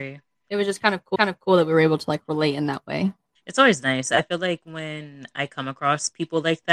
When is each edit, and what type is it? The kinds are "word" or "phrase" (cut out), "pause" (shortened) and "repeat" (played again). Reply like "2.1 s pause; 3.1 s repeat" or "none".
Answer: 1.2 s repeat; 3.4 s pause